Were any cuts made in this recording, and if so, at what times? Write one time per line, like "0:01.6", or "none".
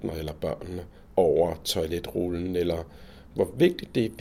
none